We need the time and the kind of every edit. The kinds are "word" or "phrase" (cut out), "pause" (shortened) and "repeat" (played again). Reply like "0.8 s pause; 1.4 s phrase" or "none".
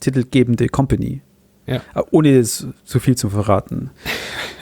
none